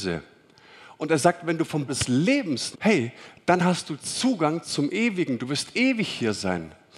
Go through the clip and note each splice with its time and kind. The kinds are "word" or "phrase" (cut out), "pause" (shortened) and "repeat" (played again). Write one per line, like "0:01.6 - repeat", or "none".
0:01.9 - word
0:02.7 - word